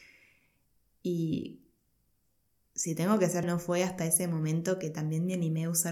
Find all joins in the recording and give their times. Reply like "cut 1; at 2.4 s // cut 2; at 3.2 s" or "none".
cut 1; at 3.4 s